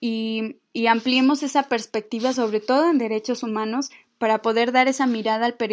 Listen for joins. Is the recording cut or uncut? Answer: uncut